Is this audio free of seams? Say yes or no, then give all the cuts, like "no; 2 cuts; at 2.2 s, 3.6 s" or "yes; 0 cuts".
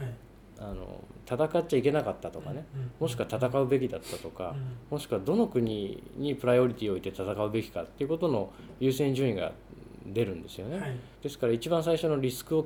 no; 1 cut; at 11.2 s